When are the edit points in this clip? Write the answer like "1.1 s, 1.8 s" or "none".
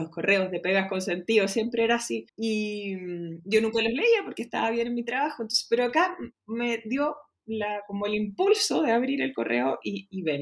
2.3 s